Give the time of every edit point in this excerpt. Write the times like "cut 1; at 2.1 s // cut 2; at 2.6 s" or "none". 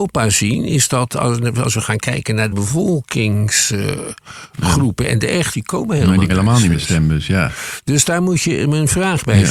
cut 1; at 2.5 s // cut 2; at 5.5 s // cut 3; at 6.3 s // cut 4; at 6.7 s